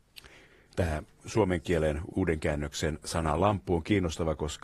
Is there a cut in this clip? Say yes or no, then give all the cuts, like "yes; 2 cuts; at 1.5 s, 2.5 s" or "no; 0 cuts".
no; 0 cuts